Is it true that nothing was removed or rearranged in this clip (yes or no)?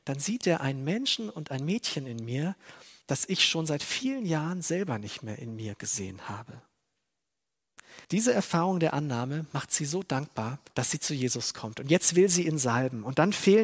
no